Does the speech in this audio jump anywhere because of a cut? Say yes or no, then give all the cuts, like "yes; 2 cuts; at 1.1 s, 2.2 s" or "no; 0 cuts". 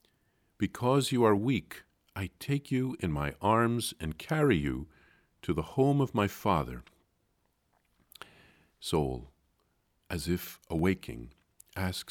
no; 0 cuts